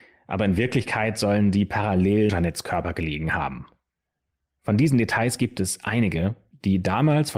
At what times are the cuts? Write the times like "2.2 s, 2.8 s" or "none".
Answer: 2.3 s